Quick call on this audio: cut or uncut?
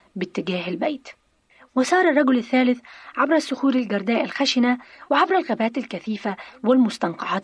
uncut